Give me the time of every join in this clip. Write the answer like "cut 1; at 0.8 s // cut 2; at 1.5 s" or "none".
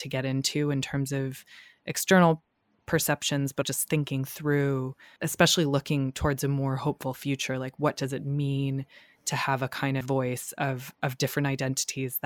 cut 1; at 3.6 s // cut 2; at 10.0 s